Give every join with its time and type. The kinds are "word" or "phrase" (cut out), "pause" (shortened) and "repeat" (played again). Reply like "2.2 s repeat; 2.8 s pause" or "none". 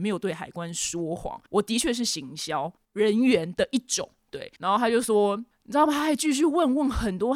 1.5 s pause; 2.8 s pause; 4.6 s pause

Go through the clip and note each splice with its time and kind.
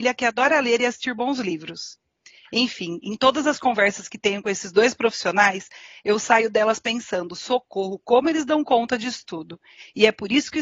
none

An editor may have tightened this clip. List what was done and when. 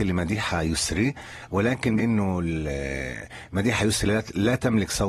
2.0 s word

